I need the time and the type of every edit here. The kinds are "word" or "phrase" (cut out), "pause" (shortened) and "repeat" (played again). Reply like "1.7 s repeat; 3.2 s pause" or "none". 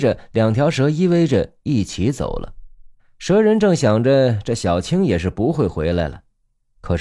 3.0 s pause